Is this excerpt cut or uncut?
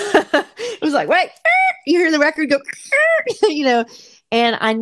uncut